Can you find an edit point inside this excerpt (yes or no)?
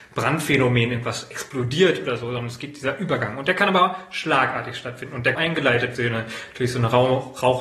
yes